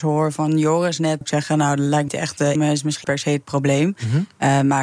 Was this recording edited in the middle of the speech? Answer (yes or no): yes